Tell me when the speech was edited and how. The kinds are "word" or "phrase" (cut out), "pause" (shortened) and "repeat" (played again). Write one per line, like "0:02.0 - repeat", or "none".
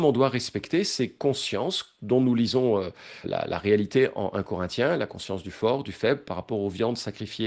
0:03.2 - word